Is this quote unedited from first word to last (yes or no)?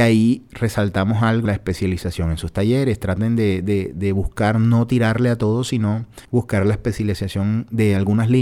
no